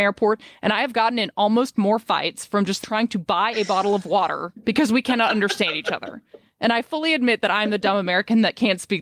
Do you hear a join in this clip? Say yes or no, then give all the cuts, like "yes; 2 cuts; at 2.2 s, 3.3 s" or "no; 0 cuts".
no; 0 cuts